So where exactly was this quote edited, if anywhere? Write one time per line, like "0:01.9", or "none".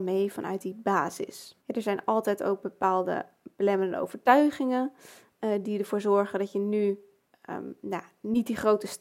0:01.6